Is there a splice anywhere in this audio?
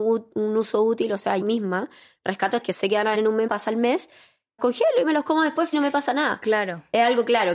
yes; 6 cuts; at 1.4 s, 2.6 s, 3.1 s, 3.5 s, 4.6 s, 5.7 s

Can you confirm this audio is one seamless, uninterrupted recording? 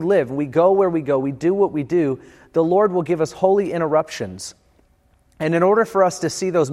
yes; 0 cuts

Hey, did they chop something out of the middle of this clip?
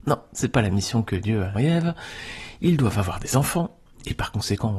yes; 1 cut; at 1.6 s

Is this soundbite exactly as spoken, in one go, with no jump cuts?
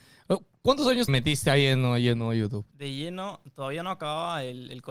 no; 2 cuts; at 1.1 s, 2.7 s

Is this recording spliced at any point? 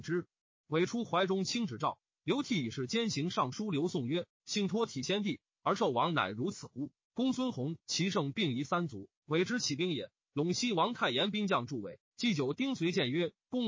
yes; 2 cuts; at 7.0 s, 9.2 s

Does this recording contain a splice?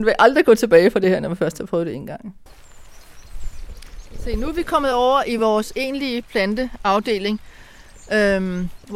no; 0 cuts

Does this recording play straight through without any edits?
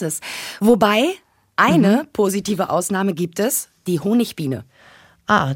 yes; 0 cuts

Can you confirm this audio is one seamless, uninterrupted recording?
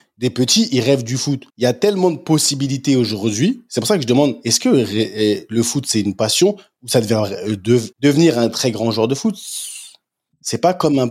no; 2 cuts; at 1.5 s, 7.9 s

